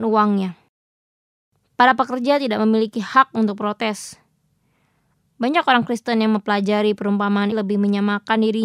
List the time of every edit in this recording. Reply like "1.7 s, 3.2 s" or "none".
7.5 s